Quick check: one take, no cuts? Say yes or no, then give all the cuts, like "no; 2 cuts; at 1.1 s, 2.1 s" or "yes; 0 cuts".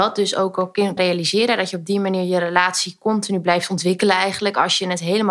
no; 1 cut; at 1.0 s